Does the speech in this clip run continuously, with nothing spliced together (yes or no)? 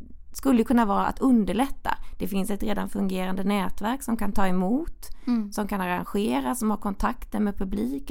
yes